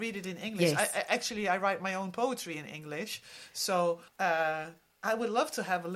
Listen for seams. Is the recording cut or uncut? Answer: cut